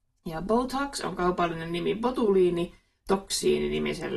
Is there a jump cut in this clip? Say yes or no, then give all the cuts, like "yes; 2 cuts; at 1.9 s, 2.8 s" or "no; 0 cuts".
no; 0 cuts